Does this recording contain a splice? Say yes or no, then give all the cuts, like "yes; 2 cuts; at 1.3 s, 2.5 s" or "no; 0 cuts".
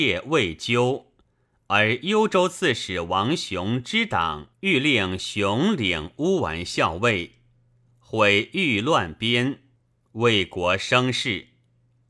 yes; 1 cut; at 4.5 s